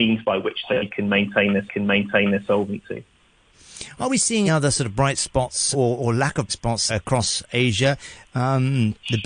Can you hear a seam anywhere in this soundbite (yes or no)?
yes